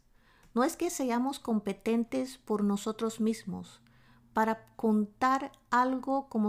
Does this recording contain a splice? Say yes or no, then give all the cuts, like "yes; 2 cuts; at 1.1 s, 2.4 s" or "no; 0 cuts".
no; 0 cuts